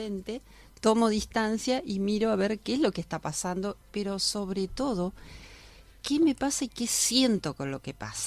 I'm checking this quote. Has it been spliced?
yes; 1 cut; at 3.8 s

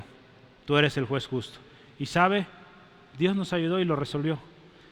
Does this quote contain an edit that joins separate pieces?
no; 0 cuts

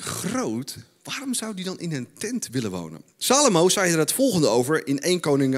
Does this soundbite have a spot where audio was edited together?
no; 0 cuts

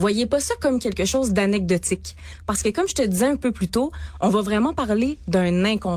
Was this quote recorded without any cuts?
yes; 0 cuts

